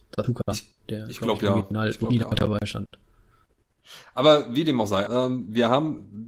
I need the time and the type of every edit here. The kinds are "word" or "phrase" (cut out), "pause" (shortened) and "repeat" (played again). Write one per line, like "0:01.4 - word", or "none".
0:05.1 - word

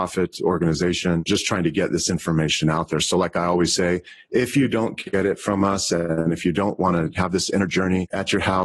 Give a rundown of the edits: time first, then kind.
none

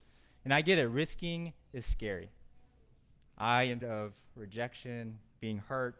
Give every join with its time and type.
0:03.8 - word

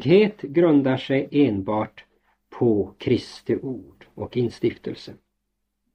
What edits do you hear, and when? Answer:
none

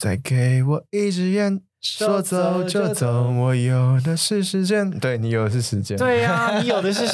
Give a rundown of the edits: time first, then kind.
0:01.7 - pause

